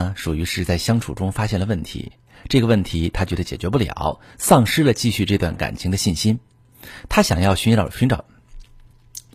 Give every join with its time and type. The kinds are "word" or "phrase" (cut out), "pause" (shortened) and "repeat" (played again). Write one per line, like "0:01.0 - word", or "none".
none